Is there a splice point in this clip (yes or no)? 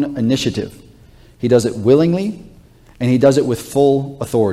no